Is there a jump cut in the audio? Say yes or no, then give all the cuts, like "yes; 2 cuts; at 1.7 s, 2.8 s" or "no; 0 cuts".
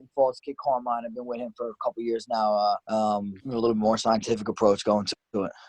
yes; 2 cuts; at 2.8 s, 3.4 s